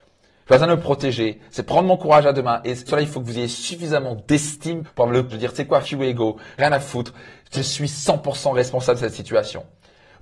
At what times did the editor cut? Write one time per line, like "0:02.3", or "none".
0:02.9
0:04.8
0:05.3
0:05.8
0:06.6
0:07.5